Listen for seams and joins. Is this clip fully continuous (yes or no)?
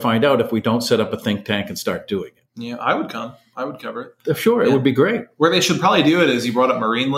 no